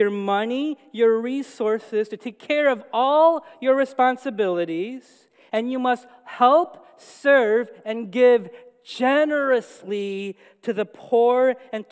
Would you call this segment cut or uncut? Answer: uncut